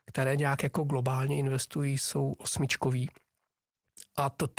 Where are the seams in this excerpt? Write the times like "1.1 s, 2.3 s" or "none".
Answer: none

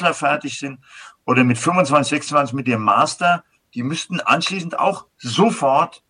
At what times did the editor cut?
none

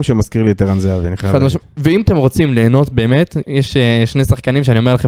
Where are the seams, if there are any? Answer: 3.4 s

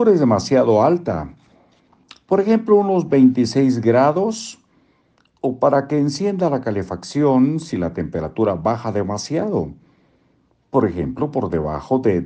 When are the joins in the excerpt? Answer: none

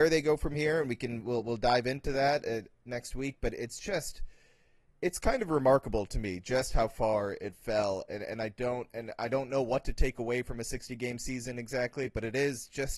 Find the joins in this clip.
none

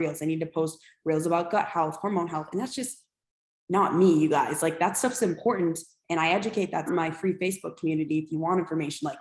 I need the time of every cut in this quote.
6.9 s

